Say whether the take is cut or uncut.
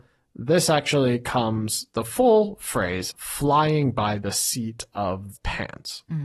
cut